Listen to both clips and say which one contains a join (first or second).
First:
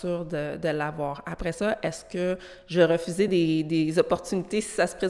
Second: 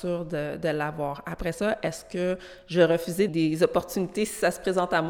second